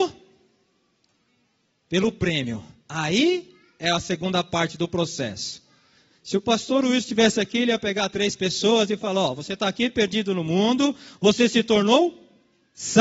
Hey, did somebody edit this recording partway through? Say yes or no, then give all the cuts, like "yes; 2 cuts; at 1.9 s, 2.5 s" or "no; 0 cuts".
no; 0 cuts